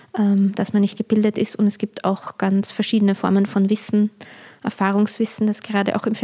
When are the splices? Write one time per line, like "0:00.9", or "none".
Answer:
none